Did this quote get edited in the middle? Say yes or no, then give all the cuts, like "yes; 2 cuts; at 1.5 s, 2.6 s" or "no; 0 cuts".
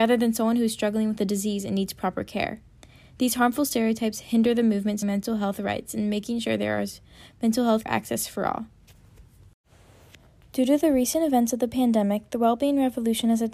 yes; 2 cuts; at 5.0 s, 7.9 s